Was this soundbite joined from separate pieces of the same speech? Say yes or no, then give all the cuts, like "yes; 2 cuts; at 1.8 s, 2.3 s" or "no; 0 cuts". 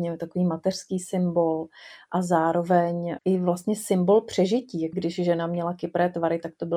yes; 2 cuts; at 3.2 s, 4.9 s